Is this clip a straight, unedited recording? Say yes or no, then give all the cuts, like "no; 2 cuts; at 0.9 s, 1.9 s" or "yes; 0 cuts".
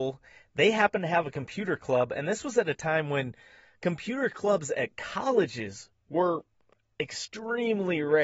yes; 0 cuts